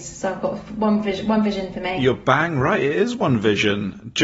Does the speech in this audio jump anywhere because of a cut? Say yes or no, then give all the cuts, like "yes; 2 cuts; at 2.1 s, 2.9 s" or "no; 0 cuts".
no; 0 cuts